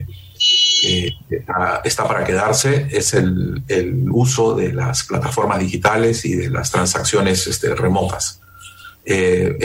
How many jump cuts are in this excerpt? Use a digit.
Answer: 0